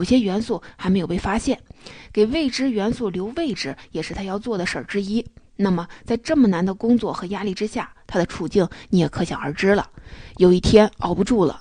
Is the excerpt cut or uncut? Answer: uncut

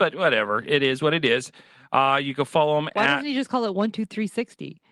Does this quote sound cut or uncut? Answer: uncut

